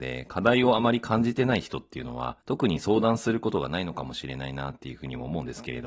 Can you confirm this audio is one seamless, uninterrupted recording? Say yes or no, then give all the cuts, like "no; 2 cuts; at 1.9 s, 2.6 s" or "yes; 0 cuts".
no; 1 cut; at 2.4 s